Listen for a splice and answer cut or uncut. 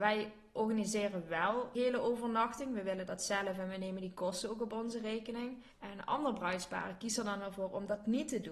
cut